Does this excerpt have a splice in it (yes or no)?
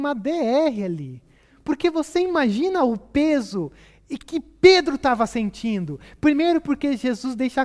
no